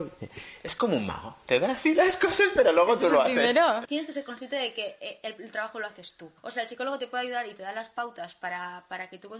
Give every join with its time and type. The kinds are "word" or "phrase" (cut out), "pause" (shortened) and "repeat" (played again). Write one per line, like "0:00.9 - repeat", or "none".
0:06.4 - pause

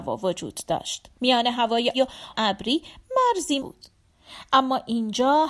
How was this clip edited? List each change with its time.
0:01.2 - pause
0:01.9 - word
0:02.3 - word
0:03.6 - word

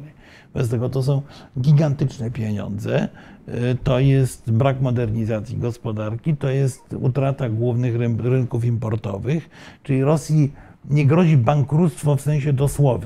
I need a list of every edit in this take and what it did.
none

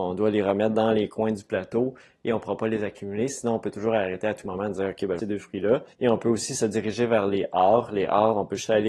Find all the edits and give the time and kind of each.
0:05.2 - phrase
0:05.9 - pause

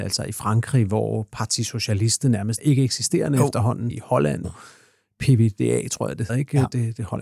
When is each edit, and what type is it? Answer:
0:02.6 - word
0:03.9 - word
0:04.4 - word
0:06.3 - word

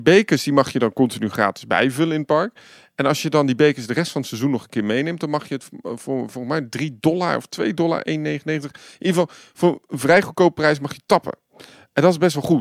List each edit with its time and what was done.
none

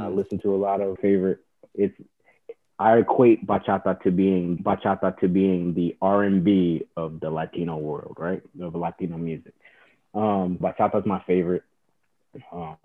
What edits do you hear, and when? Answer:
0:01.0 - phrase
0:04.6 - repeat
0:10.6 - word

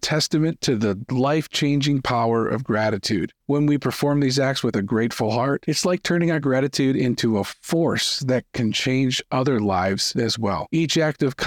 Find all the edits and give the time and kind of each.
0:03.4 - pause

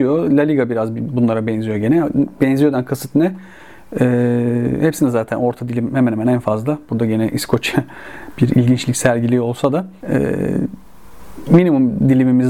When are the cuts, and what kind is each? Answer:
0:10.0 - pause

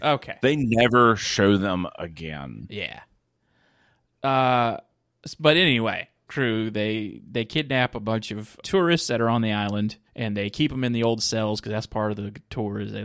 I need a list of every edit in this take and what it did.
0:06.3 - phrase
0:08.6 - word
0:10.1 - pause

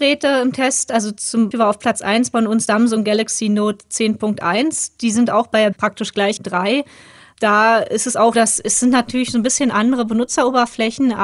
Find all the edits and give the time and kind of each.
0:01.5 - word
0:02.7 - word
0:05.7 - phrase
0:06.4 - phrase
0:08.3 - word

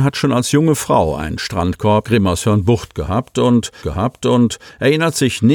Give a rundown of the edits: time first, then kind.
0:02.0 - phrase
0:03.8 - repeat

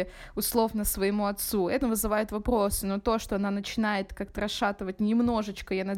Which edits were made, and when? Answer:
0:01.8 - word

